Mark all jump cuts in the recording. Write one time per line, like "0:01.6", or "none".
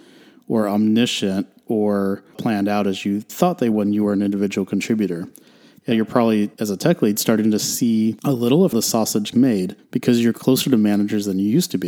0:02.3
0:03.3
0:03.7
0:05.9
0:08.7
0:09.3